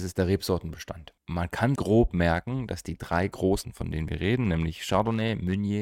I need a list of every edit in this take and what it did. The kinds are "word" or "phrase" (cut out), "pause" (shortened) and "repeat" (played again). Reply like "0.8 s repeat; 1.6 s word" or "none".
1.8 s word; 3.6 s word